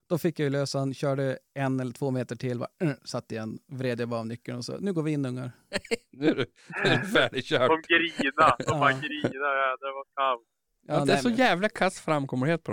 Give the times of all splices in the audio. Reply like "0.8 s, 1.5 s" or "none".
none